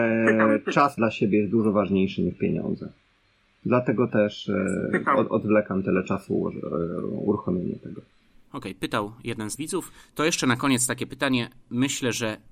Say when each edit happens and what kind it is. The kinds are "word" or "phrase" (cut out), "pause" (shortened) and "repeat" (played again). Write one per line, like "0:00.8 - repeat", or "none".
0:01.0 - word
0:09.6 - word

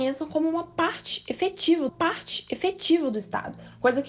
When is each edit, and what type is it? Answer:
0:01.9 - repeat

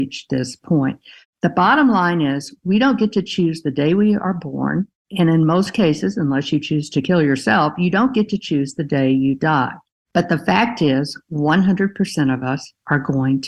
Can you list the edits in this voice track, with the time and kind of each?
none

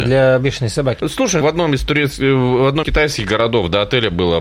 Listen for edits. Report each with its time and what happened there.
0:01.0 - word
0:01.4 - word
0:02.8 - word

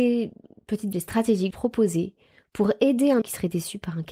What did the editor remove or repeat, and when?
0:00.9 - word
0:01.5 - phrase
0:03.2 - word

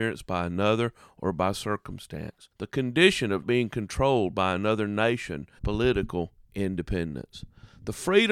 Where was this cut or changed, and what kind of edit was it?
0:02.5 - pause
0:03.4 - word
0:05.6 - phrase

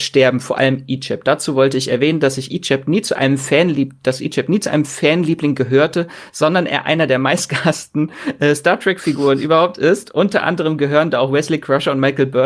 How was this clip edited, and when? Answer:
none

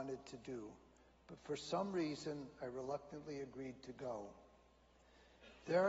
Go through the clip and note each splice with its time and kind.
none

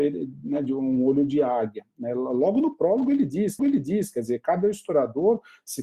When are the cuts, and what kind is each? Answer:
0:03.6 - repeat

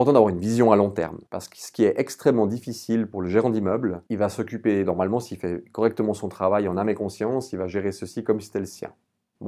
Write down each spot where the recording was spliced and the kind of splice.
none

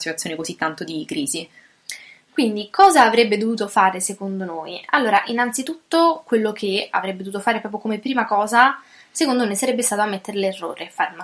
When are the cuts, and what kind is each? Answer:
none

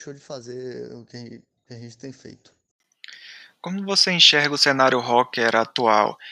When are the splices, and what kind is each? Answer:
none

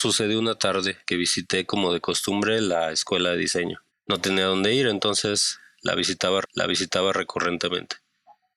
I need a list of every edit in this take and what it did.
0:01.0 - pause
0:03.9 - pause
0:06.4 - repeat

